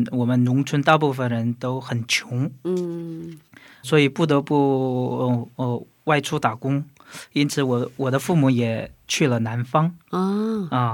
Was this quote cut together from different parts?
yes; 1 cut; at 3.8 s

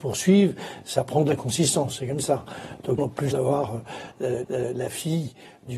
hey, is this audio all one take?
no; 3 cuts; at 3.0 s, 3.3 s, 4.4 s

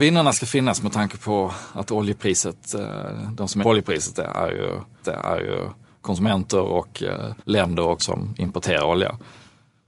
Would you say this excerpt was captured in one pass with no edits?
no; 4 cuts; at 3.6 s, 5.0 s, 7.4 s, 8.0 s

